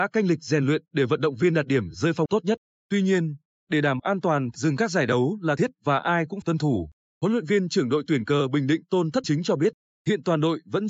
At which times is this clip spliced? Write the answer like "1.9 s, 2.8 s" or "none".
2.3 s, 4.0 s, 4.6 s, 5.6 s, 6.4 s, 9.2 s